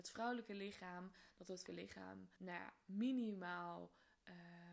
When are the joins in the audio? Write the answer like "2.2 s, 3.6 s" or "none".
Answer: 1.7 s, 2.4 s